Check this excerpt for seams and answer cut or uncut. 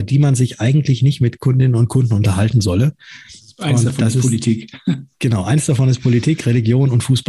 uncut